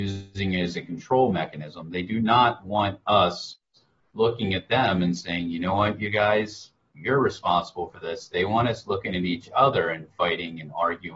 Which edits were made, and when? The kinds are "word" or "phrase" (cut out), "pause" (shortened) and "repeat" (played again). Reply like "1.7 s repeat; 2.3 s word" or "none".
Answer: none